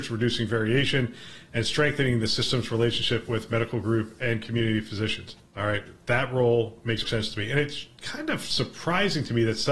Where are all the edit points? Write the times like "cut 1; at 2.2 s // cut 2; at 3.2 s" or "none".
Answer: cut 1; at 5.4 s // cut 2; at 7.0 s